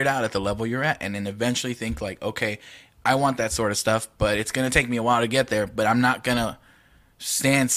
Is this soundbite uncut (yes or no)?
yes